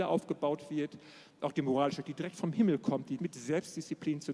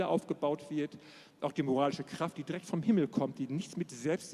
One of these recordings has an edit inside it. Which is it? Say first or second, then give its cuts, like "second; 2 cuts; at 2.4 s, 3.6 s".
first; 2 cuts; at 2.0 s, 3.2 s